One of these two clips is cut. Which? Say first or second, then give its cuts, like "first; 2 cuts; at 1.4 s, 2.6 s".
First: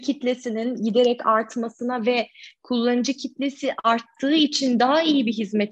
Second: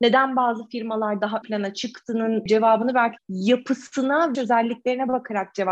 second; 3 cuts; at 1.4 s, 3.2 s, 4.3 s